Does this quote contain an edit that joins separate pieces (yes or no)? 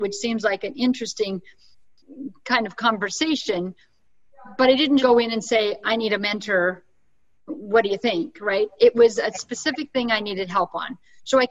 yes